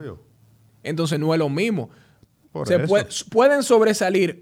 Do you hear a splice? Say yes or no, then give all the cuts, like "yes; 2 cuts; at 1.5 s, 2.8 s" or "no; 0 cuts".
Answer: no; 0 cuts